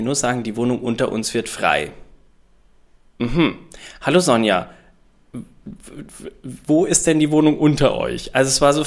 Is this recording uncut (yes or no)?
yes